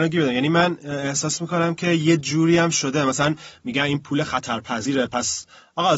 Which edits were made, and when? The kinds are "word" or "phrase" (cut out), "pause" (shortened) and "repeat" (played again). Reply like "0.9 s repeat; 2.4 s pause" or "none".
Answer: none